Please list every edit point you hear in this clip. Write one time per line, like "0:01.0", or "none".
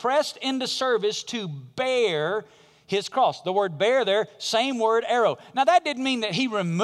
none